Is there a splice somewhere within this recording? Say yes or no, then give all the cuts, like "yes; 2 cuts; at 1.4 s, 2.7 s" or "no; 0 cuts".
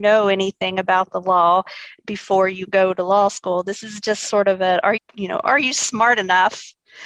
yes; 2 cuts; at 2.0 s, 5.0 s